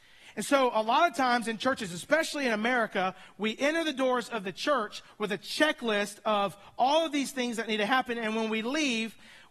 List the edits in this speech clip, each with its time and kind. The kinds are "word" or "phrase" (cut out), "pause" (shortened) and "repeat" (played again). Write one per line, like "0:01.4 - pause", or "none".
none